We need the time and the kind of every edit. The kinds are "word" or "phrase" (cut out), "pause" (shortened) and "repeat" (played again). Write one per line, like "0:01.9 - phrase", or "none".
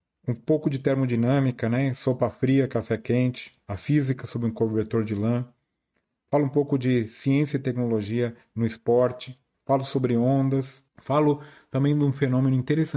0:03.6 - pause
0:09.5 - pause
0:10.9 - pause